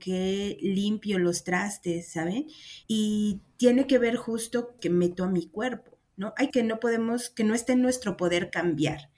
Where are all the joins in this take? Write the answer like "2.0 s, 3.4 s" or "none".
2.8 s, 4.8 s, 6.5 s